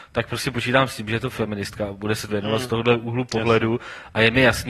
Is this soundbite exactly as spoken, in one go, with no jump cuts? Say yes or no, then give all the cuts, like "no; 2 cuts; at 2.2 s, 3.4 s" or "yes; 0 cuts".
no; 1 cut; at 2.3 s